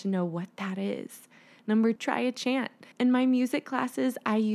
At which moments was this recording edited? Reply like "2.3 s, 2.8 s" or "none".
2.0 s, 2.9 s